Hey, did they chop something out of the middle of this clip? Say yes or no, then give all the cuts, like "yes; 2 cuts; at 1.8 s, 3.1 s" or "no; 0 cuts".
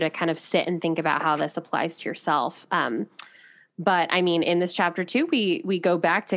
no; 0 cuts